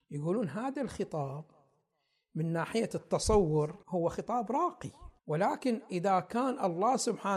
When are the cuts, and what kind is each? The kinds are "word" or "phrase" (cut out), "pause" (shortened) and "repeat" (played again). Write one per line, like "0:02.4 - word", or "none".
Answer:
0:03.8 - pause
0:05.2 - pause